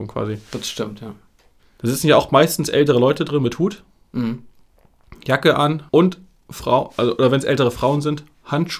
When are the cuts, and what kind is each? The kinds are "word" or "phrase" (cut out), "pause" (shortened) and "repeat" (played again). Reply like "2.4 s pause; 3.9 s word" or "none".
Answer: 5.9 s pause